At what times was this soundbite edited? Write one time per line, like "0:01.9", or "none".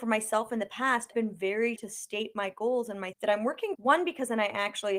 0:01.1
0:01.8
0:03.1
0:03.8